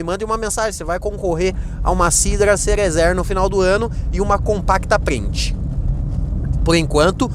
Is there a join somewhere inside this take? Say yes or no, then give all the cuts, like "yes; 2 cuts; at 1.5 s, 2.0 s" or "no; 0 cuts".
no; 0 cuts